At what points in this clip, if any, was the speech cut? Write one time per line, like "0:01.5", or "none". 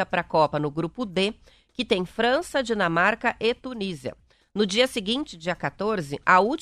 none